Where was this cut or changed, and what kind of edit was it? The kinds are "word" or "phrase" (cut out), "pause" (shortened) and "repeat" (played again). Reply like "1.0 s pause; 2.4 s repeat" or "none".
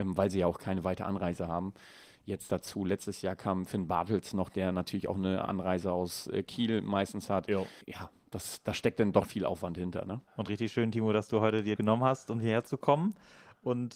7.8 s pause; 9.2 s word; 10.3 s pause; 11.8 s phrase

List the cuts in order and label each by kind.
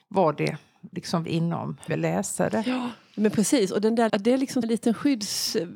1.2 s word; 1.9 s word; 4.1 s word; 4.6 s word

